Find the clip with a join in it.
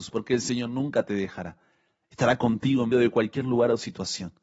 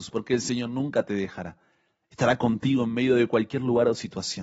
first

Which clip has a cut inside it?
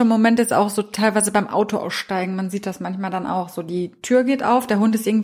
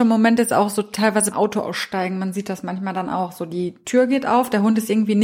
second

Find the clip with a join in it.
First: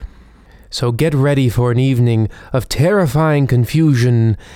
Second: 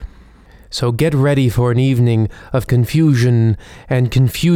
second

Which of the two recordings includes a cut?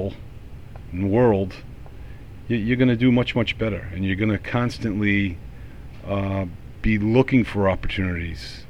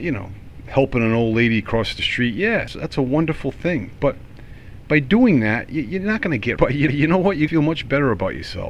second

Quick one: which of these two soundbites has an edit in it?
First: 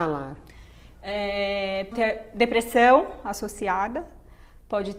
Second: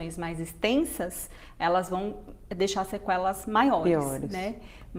first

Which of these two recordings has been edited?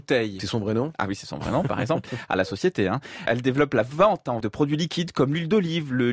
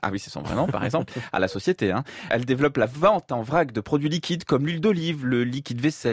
first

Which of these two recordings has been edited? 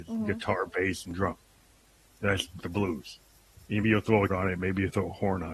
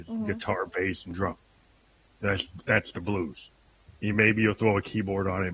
first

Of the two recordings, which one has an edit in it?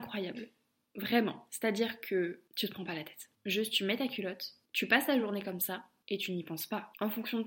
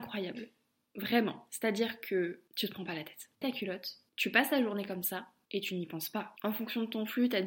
second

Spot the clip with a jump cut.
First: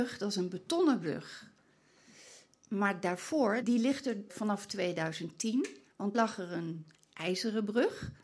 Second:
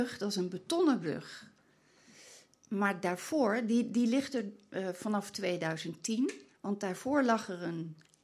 first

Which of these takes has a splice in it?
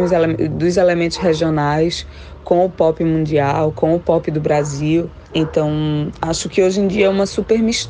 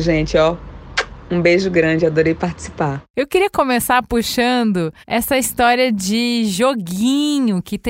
second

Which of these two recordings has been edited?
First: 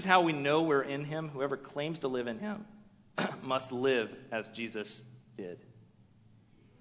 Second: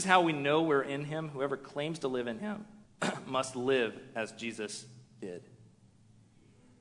second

